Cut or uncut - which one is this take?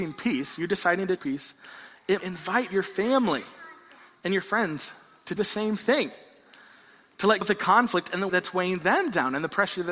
cut